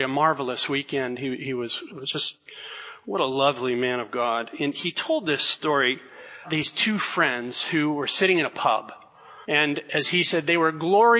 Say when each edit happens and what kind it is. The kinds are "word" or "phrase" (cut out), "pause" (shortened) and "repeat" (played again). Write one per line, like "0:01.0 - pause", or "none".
0:01.9 - word
0:06.4 - word
0:09.4 - pause